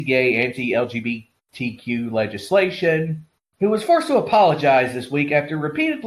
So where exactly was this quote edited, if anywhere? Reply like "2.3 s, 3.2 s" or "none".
none